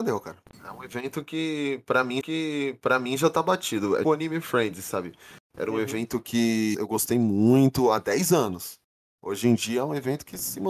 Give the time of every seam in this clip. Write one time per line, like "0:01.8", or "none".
0:02.2
0:04.0
0:06.7